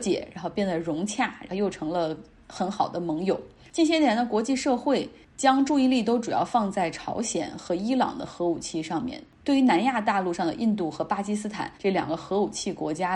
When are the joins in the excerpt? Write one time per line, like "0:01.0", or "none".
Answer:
0:03.6
0:11.8